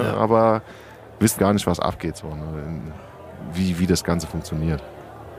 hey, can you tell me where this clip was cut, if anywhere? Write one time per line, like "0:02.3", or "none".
0:01.4